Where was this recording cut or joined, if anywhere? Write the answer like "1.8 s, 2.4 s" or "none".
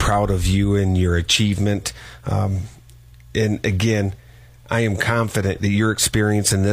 none